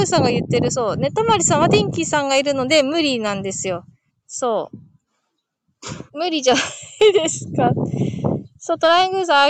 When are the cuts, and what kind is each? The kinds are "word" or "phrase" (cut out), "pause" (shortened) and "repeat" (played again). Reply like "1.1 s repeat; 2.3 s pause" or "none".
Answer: 4.1 s pause; 6.1 s pause; 8.5 s pause

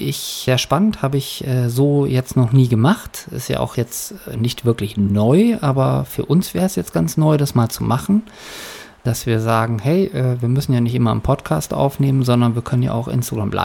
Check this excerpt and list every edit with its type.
none

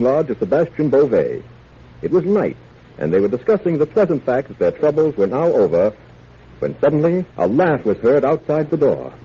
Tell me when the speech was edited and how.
7.3 s pause

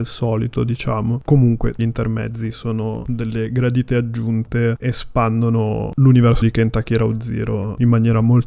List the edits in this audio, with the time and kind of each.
1.8 s phrase; 4.8 s word; 6.4 s word

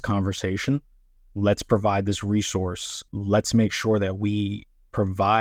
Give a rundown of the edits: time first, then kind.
3.1 s pause

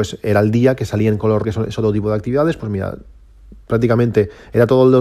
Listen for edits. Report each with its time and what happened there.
1.4 s word

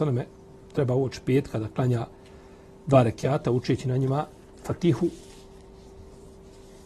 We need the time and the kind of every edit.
none

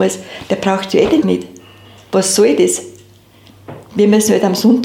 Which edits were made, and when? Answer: 1.2 s word

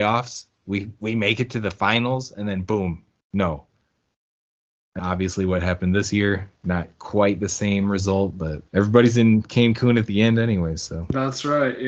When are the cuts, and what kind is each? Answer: 3.2 s pause; 5.0 s word; 6.6 s pause; 8.7 s pause

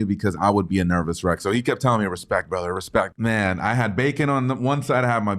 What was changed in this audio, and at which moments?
3.1 s phrase

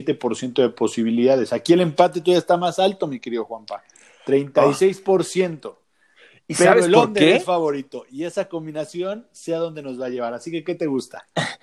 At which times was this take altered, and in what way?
none

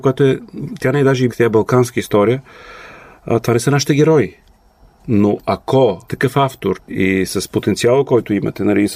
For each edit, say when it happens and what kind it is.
1.3 s word; 6.1 s word

